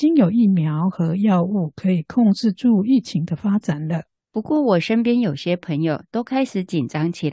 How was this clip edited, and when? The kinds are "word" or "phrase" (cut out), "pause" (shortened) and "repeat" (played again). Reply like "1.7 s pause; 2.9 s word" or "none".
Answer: 4.1 s pause